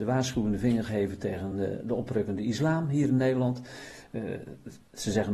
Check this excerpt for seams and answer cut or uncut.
uncut